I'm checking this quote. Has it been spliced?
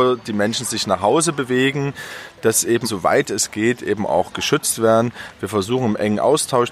yes; 1 cut; at 2.8 s

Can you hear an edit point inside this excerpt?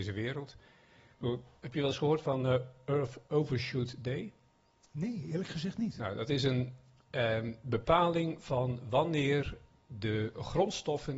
no; 0 cuts

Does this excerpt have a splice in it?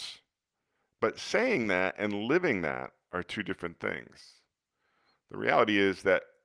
no; 0 cuts

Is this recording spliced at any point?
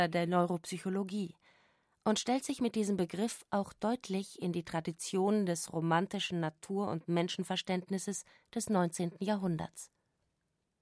no; 0 cuts

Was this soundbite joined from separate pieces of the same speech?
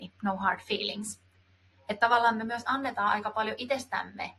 no; 0 cuts

